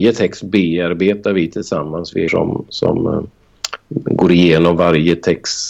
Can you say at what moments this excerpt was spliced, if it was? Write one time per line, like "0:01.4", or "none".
0:02.3